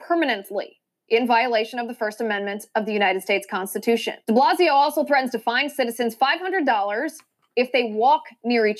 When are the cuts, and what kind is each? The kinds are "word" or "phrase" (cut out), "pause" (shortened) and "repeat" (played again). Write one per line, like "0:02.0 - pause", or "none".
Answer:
0:04.2 - pause